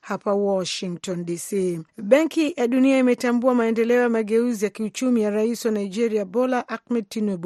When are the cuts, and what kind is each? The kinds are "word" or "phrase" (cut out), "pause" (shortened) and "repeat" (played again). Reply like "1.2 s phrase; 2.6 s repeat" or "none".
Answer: 1.9 s pause

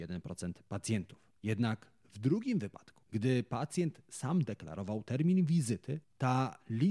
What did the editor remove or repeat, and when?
1.4 s pause; 3.0 s pause

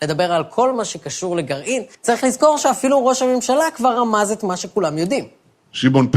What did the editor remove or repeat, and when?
1.9 s pause

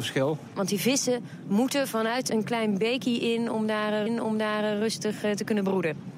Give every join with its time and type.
2.3 s word; 4.1 s repeat

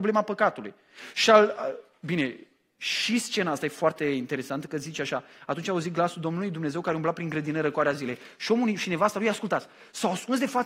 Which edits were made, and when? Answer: none

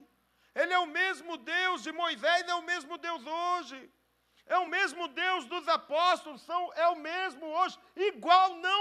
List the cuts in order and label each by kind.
none

